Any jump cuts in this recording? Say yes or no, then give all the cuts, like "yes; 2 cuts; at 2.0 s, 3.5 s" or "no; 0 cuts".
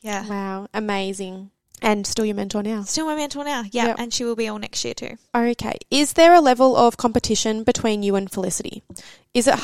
yes; 1 cut; at 1.6 s